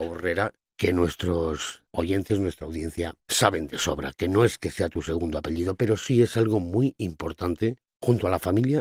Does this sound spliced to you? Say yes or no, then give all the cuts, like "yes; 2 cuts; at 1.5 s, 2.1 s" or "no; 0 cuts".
yes; 1 cut; at 1.9 s